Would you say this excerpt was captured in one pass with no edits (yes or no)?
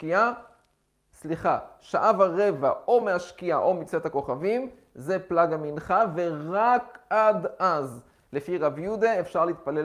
yes